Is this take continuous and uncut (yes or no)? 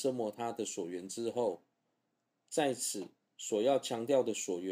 yes